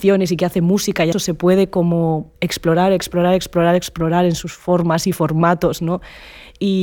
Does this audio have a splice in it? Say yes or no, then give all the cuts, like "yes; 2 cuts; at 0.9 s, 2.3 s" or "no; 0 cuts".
yes; 2 cuts; at 1.1 s, 2.4 s